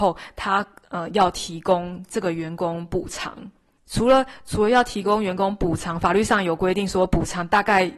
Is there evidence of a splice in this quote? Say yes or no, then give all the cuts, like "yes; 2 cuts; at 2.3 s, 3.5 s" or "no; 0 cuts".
yes; 1 cut; at 3.8 s